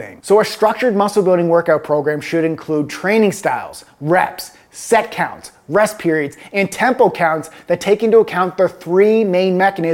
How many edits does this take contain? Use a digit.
0